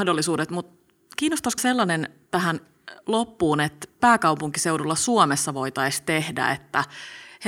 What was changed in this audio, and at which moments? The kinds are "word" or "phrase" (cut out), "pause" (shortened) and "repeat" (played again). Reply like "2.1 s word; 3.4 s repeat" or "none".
1.6 s phrase; 4.0 s phrase